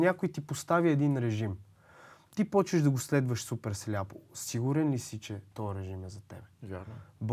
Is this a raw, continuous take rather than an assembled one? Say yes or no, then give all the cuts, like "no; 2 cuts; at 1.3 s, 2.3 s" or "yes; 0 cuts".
yes; 0 cuts